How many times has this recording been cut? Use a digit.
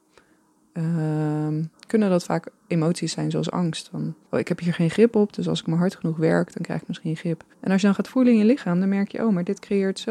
3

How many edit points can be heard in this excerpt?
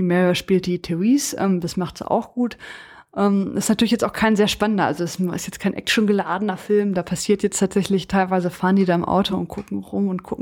0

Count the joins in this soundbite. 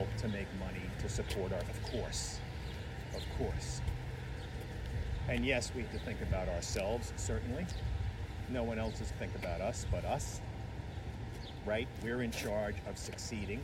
3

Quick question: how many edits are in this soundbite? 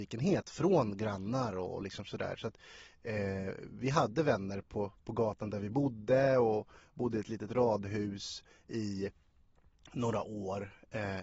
0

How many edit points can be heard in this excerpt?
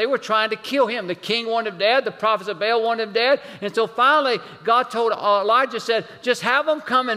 0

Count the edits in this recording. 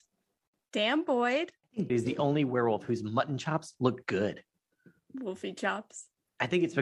1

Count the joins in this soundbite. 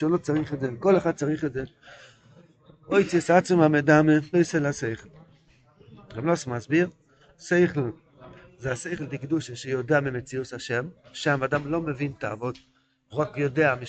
1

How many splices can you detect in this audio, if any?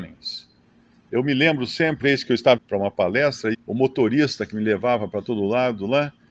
3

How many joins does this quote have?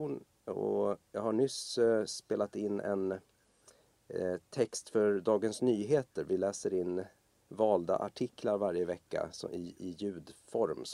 0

